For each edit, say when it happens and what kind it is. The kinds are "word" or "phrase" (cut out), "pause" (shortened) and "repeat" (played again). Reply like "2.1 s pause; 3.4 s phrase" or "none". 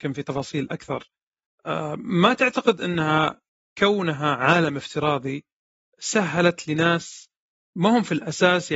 none